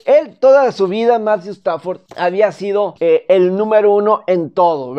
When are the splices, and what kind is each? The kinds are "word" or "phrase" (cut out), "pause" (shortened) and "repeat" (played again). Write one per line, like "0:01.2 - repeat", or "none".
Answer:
0:02.1 - pause
0:03.0 - pause